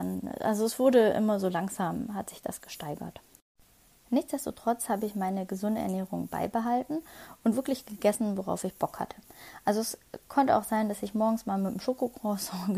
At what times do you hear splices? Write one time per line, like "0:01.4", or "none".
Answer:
none